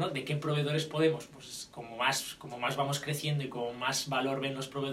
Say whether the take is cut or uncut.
uncut